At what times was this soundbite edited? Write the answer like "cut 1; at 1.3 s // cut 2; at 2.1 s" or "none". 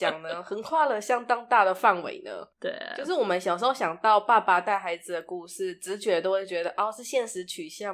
cut 1; at 2.5 s